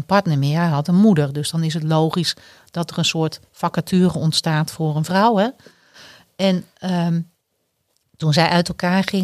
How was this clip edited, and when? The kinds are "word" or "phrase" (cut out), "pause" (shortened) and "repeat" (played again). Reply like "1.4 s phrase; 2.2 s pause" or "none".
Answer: none